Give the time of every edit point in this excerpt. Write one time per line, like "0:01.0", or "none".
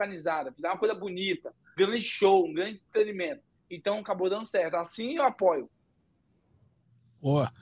0:01.8